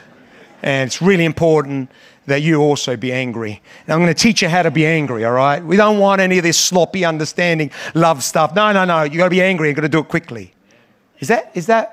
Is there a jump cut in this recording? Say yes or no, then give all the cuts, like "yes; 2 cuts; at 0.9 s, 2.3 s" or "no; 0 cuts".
no; 0 cuts